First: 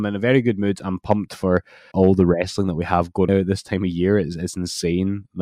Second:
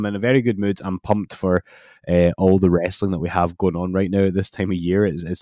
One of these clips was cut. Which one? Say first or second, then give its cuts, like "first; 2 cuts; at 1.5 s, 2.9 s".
first; 2 cuts; at 1.9 s, 3.3 s